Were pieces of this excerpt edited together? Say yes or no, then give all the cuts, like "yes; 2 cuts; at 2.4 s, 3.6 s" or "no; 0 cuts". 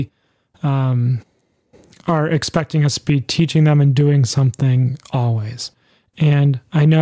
no; 0 cuts